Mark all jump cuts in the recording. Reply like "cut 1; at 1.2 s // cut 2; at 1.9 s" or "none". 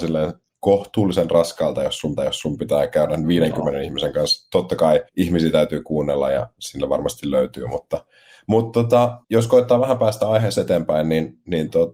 cut 1; at 2.2 s // cut 2; at 5.1 s // cut 3; at 9.2 s